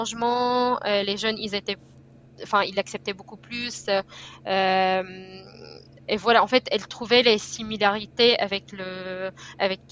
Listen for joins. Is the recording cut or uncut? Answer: uncut